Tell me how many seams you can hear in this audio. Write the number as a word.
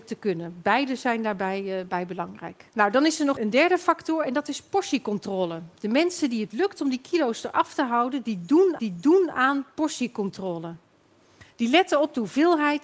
four